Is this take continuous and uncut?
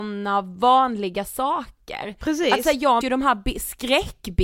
no; 1 cut; at 3.0 s

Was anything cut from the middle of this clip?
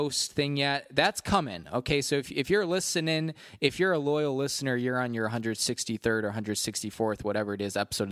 no; 0 cuts

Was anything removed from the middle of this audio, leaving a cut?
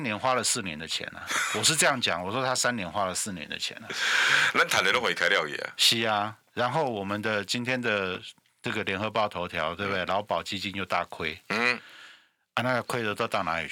no; 0 cuts

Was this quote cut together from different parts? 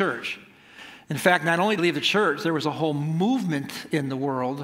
yes; 1 cut; at 1.8 s

